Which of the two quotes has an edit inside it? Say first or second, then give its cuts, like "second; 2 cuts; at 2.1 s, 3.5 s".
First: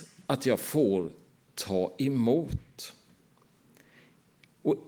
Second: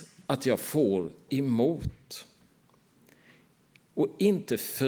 second; 1 cut; at 1.3 s